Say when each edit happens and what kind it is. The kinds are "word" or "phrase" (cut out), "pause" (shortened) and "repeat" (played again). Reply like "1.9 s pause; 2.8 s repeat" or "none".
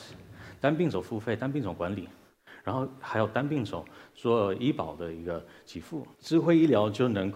6.1 s pause